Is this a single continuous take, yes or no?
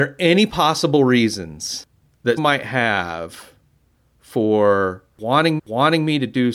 no